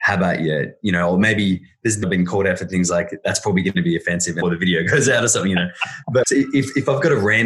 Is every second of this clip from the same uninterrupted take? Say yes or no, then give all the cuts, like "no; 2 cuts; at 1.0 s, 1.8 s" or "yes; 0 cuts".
no; 3 cuts; at 2.0 s, 4.4 s, 6.2 s